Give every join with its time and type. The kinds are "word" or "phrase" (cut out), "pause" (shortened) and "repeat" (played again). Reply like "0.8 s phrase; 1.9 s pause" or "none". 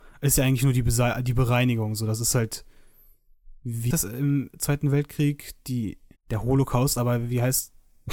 3.9 s word; 6.2 s pause

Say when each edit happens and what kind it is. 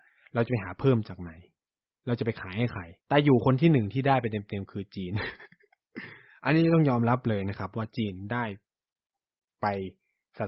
3.0 s pause

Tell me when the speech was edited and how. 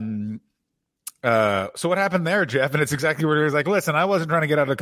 none

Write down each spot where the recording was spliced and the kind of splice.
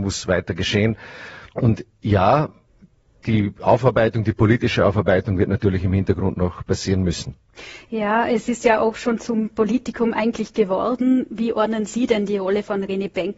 1.5 s pause; 2.7 s pause

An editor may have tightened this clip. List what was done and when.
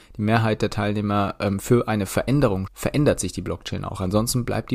2.7 s word

